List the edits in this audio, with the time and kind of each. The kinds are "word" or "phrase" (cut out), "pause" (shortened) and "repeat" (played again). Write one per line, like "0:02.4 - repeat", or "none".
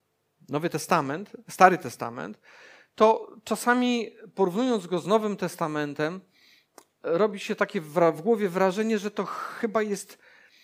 none